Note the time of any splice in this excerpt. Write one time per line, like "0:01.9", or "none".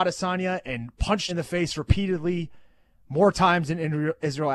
0:01.3